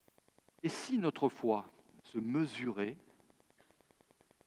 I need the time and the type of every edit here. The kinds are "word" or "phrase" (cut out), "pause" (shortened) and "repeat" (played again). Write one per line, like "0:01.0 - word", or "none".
none